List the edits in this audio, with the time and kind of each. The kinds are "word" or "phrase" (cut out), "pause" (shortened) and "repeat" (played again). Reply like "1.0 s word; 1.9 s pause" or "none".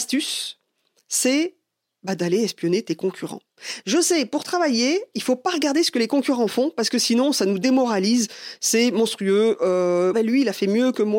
10.1 s word